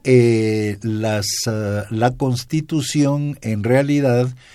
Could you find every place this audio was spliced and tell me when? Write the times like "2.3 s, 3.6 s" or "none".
none